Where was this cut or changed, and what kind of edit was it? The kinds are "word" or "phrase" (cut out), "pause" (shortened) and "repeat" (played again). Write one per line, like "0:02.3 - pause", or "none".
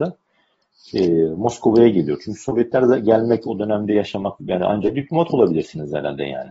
0:04.4 - word